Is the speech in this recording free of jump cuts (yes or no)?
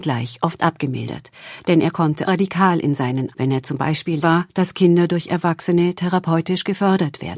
no